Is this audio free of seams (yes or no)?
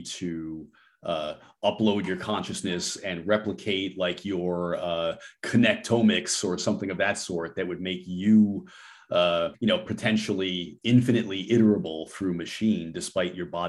no